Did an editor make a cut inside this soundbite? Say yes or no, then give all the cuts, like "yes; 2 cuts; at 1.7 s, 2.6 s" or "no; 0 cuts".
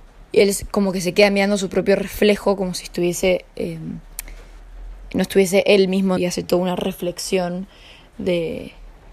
yes; 1 cut; at 6.2 s